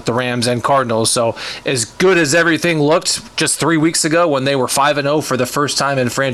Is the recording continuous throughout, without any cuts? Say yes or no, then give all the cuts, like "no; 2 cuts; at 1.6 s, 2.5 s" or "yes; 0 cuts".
yes; 0 cuts